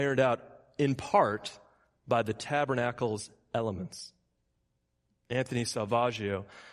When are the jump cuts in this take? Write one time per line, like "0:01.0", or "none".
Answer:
none